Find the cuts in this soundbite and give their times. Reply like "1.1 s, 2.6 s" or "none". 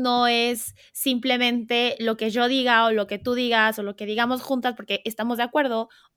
none